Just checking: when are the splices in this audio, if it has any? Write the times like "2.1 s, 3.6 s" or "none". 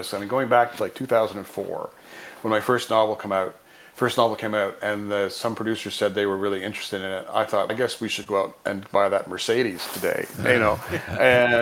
7.7 s